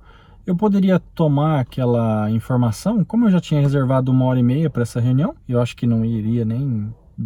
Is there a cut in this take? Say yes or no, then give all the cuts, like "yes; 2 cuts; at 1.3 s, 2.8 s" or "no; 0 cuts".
yes; 1 cut; at 5.4 s